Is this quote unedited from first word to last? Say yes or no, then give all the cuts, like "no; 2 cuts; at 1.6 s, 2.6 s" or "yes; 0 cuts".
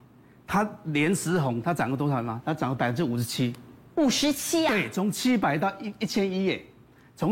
yes; 0 cuts